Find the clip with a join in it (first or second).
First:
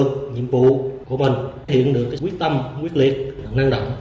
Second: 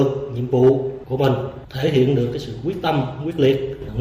first